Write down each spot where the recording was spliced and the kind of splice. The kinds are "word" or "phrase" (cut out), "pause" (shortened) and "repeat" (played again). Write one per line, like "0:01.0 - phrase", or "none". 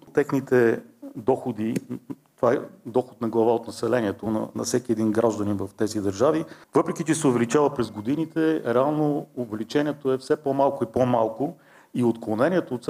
none